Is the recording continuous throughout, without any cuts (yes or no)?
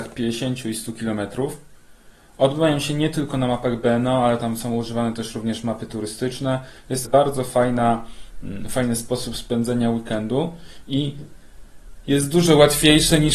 no